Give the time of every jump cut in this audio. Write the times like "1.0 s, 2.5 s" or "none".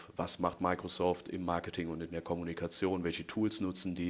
none